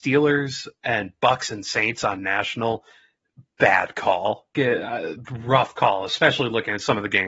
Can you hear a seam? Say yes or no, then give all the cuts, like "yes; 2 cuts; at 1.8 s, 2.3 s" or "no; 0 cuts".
no; 0 cuts